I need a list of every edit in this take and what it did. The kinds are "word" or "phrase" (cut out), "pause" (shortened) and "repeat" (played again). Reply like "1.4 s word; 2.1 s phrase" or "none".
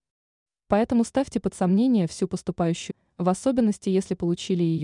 2.9 s word